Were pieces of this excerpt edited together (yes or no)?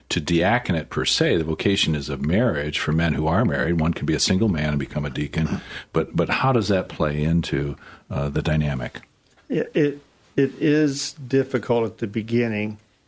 no